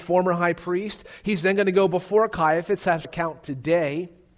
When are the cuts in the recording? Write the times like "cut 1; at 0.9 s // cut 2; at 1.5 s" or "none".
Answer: cut 1; at 3.0 s